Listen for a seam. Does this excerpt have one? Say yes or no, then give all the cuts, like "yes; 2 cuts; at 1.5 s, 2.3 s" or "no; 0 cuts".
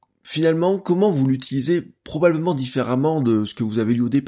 yes; 1 cut; at 2.0 s